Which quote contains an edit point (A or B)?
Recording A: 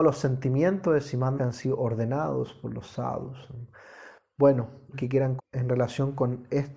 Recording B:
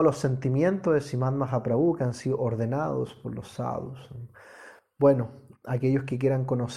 A